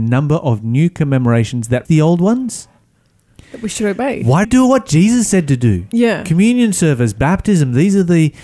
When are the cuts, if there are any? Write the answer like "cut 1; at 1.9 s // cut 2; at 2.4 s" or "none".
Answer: cut 1; at 1.8 s // cut 2; at 4.4 s

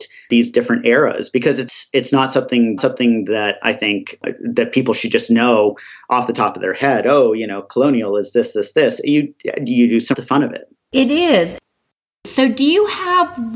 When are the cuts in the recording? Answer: cut 1; at 2.8 s // cut 2; at 10.1 s // cut 3; at 10.7 s

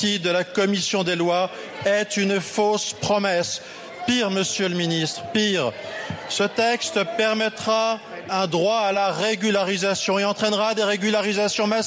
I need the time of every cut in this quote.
none

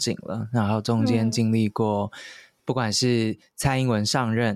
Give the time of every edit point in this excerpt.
none

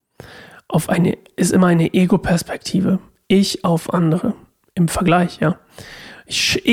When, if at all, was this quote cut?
none

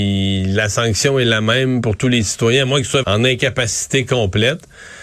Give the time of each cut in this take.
cut 1; at 3.0 s

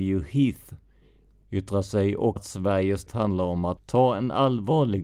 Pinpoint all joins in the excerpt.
cut 1; at 2.4 s // cut 2; at 3.1 s // cut 3; at 3.8 s

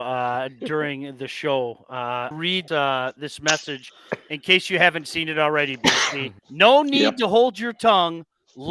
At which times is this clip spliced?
cut 1; at 2.3 s // cut 2; at 2.7 s // cut 3; at 6.4 s

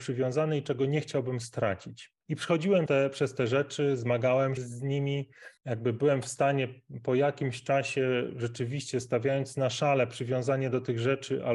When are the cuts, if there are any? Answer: cut 1; at 2.2 s // cut 2; at 2.9 s // cut 3; at 4.6 s // cut 4; at 5.6 s

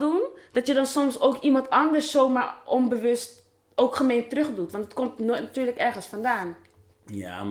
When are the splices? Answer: none

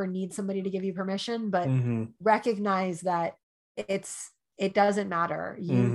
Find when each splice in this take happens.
cut 1; at 3.4 s

